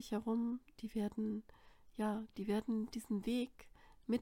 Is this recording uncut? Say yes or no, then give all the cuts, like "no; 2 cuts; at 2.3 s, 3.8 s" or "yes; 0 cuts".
yes; 0 cuts